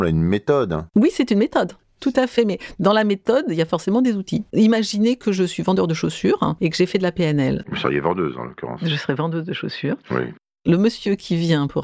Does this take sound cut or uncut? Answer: cut